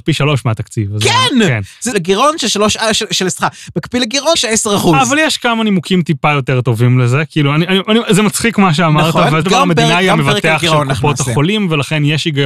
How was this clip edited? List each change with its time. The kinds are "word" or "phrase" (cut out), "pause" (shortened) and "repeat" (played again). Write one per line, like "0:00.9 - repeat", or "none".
0:01.9 - phrase
0:04.3 - word
0:09.4 - phrase